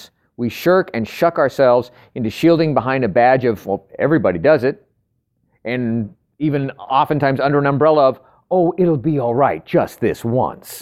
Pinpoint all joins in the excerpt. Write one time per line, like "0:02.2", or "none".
none